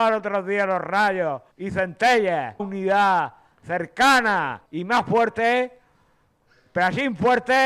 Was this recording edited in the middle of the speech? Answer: yes; 3 cuts; at 1.5 s, 2.6 s, 4.7 s

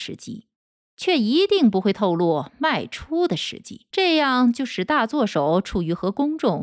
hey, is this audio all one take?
no; 1 cut; at 3.9 s

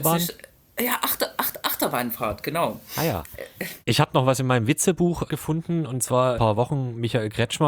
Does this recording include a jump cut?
yes; 3 cuts; at 3.8 s, 5.3 s, 6.3 s

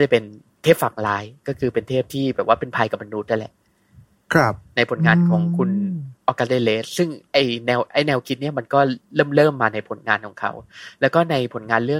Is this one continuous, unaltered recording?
yes; 0 cuts

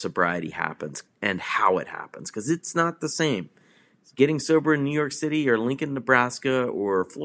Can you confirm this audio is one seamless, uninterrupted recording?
yes; 0 cuts

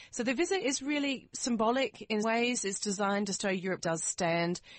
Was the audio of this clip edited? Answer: yes; 3 cuts; at 2.2 s, 3.4 s, 3.8 s

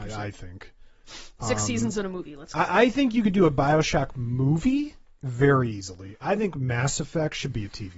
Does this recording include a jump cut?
no; 0 cuts

